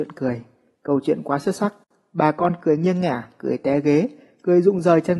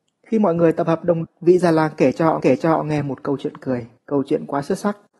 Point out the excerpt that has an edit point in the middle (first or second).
second